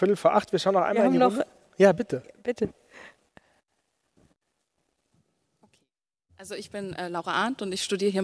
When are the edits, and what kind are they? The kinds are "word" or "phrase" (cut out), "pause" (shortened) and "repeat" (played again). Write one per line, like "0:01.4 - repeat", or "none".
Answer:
none